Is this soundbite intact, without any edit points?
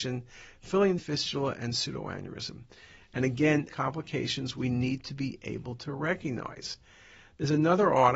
no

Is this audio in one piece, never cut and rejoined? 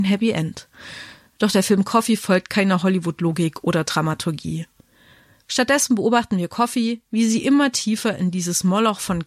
yes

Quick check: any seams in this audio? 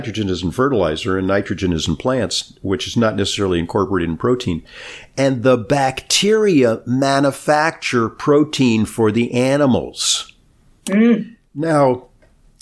no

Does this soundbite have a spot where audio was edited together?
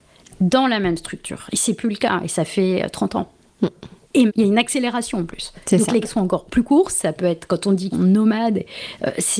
yes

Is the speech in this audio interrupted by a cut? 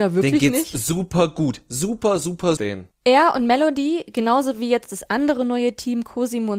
yes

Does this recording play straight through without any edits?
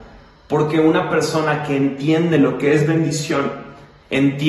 yes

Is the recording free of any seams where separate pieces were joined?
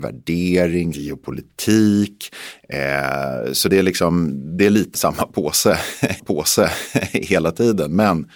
no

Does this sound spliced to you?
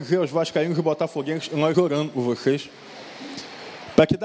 yes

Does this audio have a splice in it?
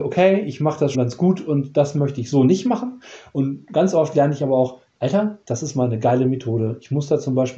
yes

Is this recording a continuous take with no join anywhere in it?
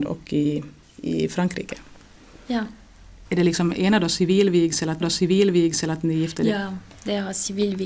no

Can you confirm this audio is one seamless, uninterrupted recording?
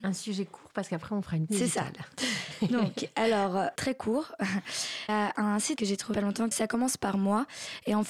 no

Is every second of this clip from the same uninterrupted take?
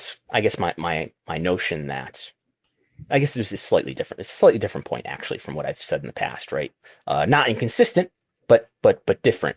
yes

